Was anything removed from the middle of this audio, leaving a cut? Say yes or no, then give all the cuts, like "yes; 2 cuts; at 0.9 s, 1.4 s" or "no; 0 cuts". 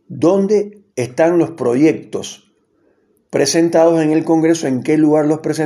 no; 0 cuts